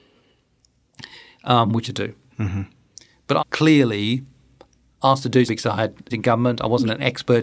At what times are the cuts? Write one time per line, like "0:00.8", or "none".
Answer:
0:01.8
0:03.4
0:05.5
0:06.1

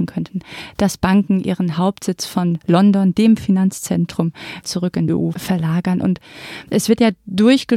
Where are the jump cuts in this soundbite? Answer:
0:04.6
0:05.1

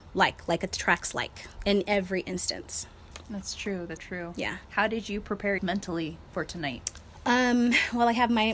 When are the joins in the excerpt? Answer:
0:04.0
0:04.6
0:05.6

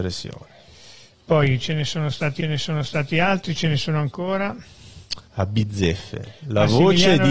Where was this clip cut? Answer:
0:02.4
0:05.3

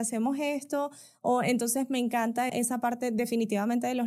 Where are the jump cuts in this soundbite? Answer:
0:02.5

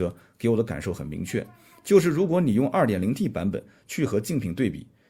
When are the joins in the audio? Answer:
none

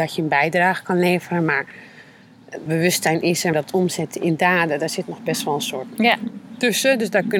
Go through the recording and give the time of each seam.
0:02.7
0:03.5
0:05.9

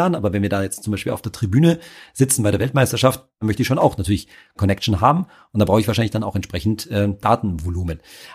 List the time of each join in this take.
none

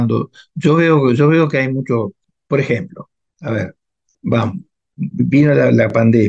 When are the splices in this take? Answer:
0:05.1

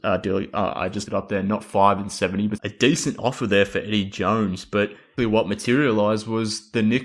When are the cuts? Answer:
0:01.1
0:02.6
0:05.2

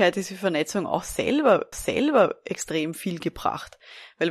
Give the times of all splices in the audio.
0:01.7

